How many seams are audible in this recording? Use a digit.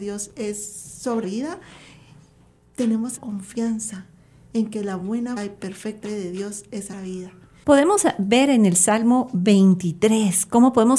5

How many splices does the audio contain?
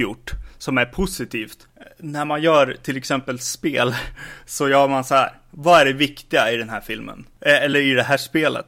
0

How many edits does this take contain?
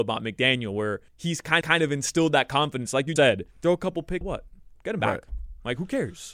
5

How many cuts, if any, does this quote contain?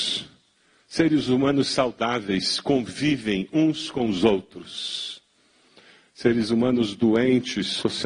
0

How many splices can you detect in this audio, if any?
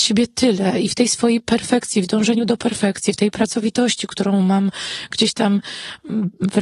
0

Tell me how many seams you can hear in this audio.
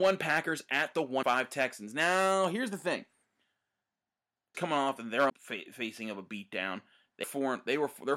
4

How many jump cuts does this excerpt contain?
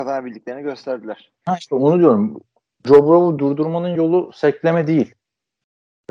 0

